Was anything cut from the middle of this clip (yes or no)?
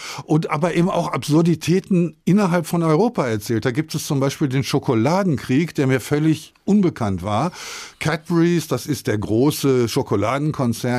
no